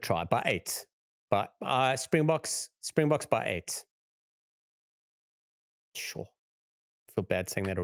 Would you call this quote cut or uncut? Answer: uncut